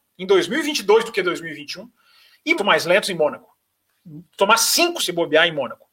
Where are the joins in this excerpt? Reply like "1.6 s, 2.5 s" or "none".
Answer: 2.6 s, 5.0 s